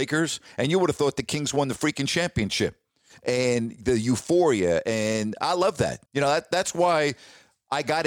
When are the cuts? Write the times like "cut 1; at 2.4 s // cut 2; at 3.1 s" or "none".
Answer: cut 1; at 6.1 s